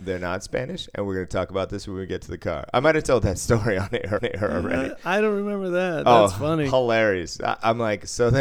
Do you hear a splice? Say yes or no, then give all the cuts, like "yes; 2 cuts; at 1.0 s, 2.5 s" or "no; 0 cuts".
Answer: yes; 1 cut; at 4.2 s